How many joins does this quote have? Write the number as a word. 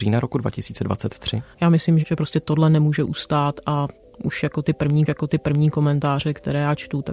three